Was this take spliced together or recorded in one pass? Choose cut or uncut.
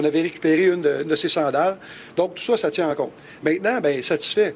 uncut